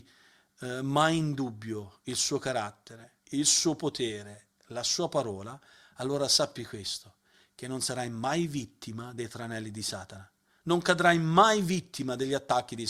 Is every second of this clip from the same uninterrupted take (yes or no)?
no